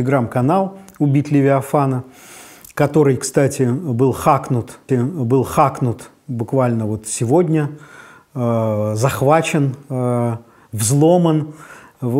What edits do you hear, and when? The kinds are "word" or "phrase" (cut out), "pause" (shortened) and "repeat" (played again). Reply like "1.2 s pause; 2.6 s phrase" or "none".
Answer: 4.9 s repeat